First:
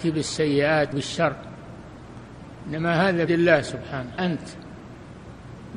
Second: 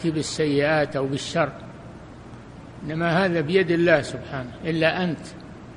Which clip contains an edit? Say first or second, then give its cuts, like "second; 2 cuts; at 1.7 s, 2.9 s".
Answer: first; 3 cuts; at 0.9 s, 3.3 s, 4.2 s